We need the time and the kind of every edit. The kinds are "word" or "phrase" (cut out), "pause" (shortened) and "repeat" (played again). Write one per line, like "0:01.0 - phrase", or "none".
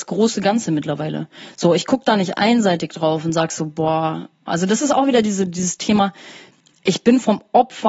none